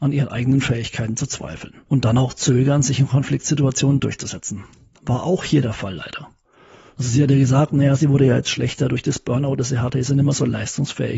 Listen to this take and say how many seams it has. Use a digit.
1